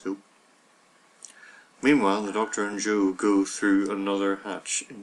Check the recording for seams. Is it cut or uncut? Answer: uncut